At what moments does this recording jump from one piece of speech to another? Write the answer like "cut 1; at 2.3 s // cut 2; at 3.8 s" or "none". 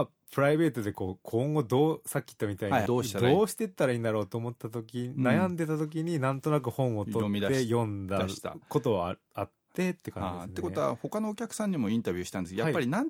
cut 1; at 2.9 s